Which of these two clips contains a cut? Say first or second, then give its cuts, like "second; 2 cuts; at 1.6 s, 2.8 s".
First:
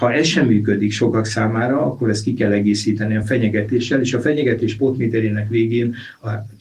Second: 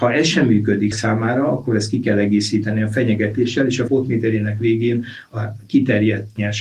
second; 2 cuts; at 0.9 s, 3.9 s